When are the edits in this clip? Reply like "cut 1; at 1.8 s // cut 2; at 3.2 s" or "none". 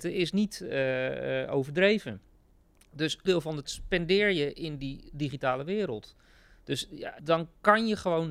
cut 1; at 3.3 s // cut 2; at 3.6 s // cut 3; at 7.2 s